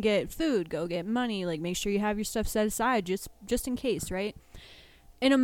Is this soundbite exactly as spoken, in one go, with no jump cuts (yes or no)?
yes